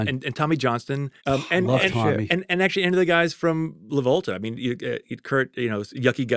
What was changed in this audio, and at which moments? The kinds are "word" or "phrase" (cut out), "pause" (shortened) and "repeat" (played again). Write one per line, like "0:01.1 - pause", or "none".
0:01.2 - pause

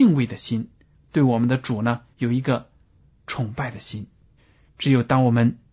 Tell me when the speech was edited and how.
0:02.1 - pause
0:04.4 - pause

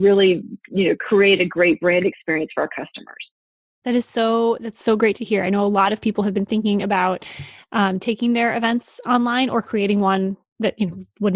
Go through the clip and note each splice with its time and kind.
none

